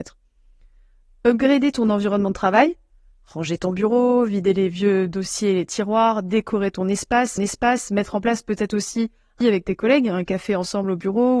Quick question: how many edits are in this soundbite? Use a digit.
2